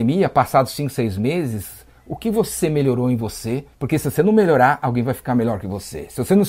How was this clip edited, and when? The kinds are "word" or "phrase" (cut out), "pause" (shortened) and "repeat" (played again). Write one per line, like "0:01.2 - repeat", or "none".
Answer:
0:03.7 - pause